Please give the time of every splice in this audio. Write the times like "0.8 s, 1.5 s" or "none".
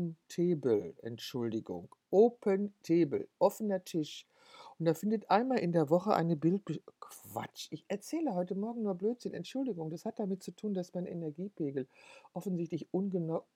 none